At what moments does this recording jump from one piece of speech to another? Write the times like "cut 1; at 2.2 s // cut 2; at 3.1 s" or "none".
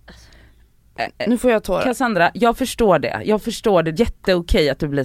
cut 1; at 4.0 s